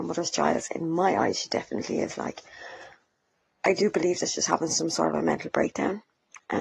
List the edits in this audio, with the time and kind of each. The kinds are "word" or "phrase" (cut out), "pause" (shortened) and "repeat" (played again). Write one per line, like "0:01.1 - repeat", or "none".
none